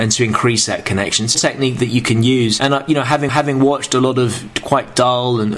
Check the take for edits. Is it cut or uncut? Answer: cut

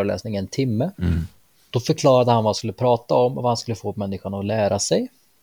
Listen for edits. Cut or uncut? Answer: cut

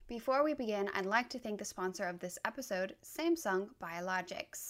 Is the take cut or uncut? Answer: uncut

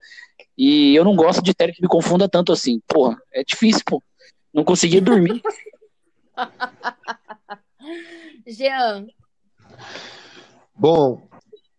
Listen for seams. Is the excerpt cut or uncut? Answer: uncut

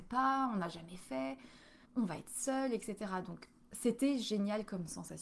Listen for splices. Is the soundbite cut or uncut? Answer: cut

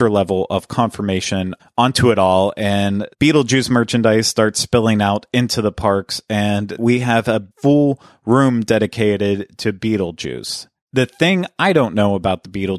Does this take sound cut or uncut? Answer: cut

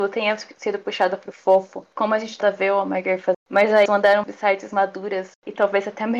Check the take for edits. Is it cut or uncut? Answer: cut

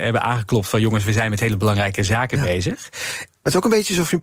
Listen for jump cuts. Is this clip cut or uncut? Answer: uncut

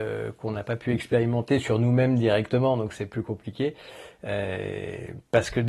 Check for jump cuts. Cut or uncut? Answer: uncut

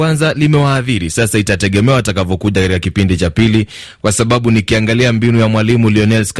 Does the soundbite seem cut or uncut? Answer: uncut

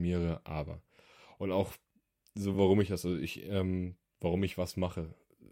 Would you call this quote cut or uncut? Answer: uncut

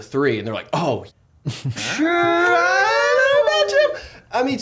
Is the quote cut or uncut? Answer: cut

